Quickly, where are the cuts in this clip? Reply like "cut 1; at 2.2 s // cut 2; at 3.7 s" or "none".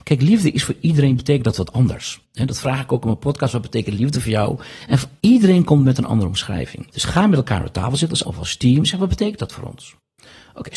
cut 1; at 6.9 s // cut 2; at 8.2 s